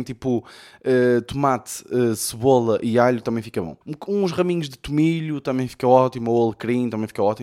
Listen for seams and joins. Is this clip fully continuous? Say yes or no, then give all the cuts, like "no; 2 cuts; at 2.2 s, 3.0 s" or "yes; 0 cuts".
no; 1 cut; at 3.8 s